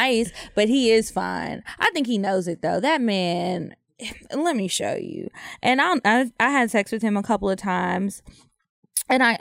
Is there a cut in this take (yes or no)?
no